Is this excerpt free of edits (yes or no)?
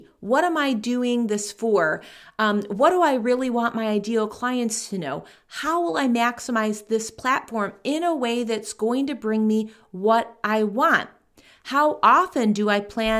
yes